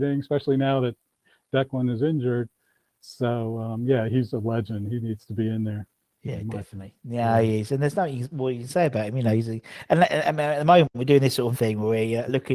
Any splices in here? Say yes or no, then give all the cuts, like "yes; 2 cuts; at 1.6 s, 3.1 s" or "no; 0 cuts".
yes; 2 cuts; at 4.3 s, 11.5 s